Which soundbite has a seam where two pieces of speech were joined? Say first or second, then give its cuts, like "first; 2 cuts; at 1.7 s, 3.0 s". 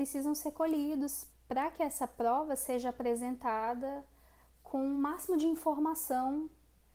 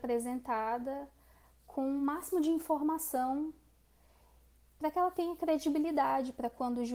first; 1 cut; at 1.3 s